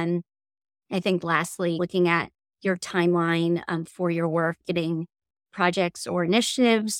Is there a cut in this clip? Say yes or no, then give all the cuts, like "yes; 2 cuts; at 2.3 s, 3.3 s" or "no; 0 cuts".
no; 0 cuts